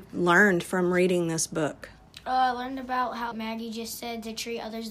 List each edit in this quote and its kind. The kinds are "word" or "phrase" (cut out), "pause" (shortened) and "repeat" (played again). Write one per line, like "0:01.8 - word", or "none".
0:03.3 - word